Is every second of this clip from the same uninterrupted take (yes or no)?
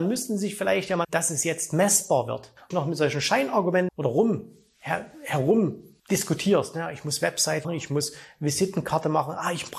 no